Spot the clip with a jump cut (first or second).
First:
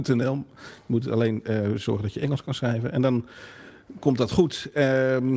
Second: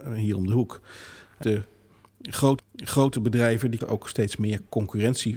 second